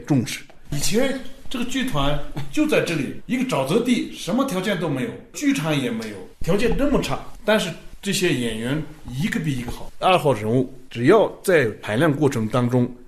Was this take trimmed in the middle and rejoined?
yes; 1 cut; at 10.0 s

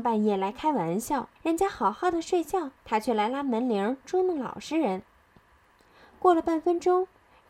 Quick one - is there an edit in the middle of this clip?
yes; 2 cuts; at 1.4 s, 2.8 s

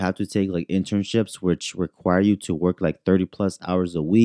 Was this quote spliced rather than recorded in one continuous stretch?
no; 0 cuts

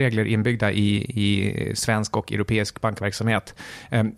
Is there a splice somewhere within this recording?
no; 0 cuts

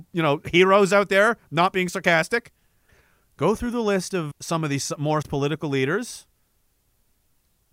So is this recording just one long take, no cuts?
no; 3 cuts; at 2.9 s, 4.3 s, 5.2 s

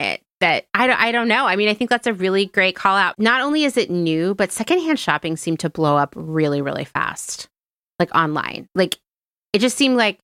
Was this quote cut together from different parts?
no; 0 cuts

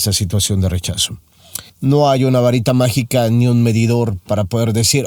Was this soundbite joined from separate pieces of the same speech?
yes; 1 cut; at 1.7 s

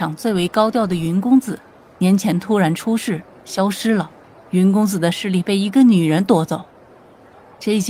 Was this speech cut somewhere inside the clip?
yes; 1 cut; at 4.2 s

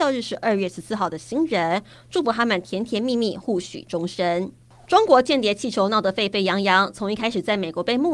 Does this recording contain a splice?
no; 0 cuts

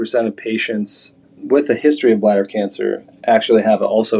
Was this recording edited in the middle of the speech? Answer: yes; 1 cut; at 1.2 s

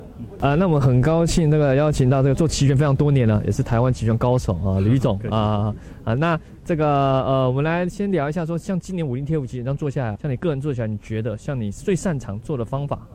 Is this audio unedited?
no; 1 cut; at 10.2 s

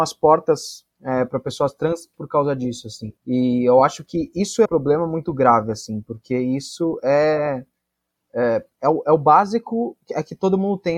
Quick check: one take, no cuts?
no; 4 cuts; at 0.9 s, 2.1 s, 3.2 s, 4.7 s

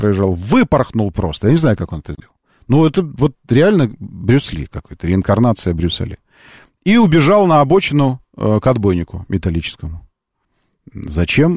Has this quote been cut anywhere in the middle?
no; 0 cuts

